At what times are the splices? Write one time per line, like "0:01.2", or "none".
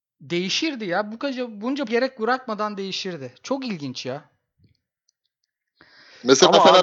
0:01.9